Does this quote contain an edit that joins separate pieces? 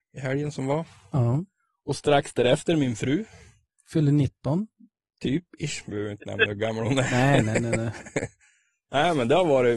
no; 0 cuts

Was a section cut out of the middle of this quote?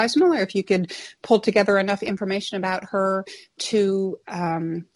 no; 0 cuts

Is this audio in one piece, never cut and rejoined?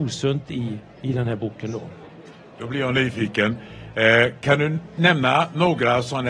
yes; 0 cuts

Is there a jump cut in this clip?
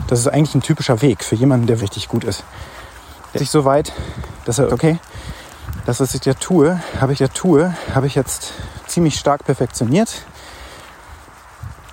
yes; 4 cuts; at 1.8 s, 3.4 s, 4.7 s, 7.1 s

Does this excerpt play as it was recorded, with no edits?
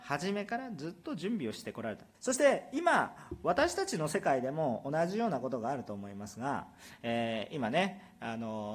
no; 1 cut; at 2.1 s

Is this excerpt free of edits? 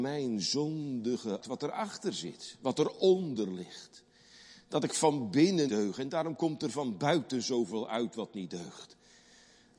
no; 2 cuts; at 1.4 s, 5.7 s

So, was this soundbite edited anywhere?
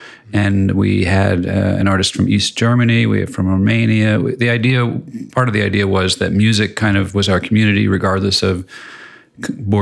no; 0 cuts

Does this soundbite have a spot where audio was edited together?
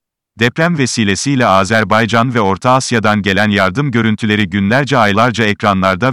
no; 0 cuts

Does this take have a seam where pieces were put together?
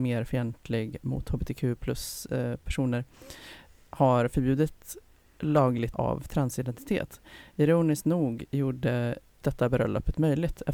yes; 2 cuts; at 5.9 s, 9.4 s

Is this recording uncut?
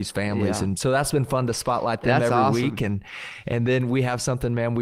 yes; 0 cuts

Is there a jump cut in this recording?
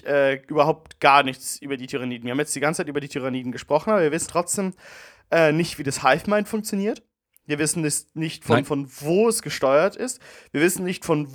yes; 1 cut; at 4.3 s

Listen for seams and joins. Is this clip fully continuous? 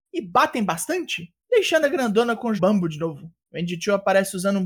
no; 3 cuts; at 1.4 s, 2.6 s, 3.4 s

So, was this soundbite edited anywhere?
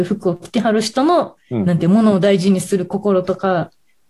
no; 0 cuts

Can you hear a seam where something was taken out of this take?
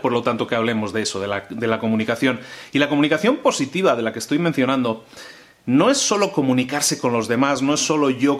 no; 0 cuts

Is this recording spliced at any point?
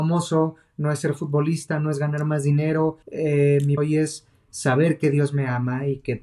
yes; 2 cuts; at 3.0 s, 3.8 s

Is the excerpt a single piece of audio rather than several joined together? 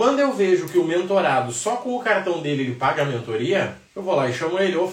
no; 1 cut; at 3.9 s

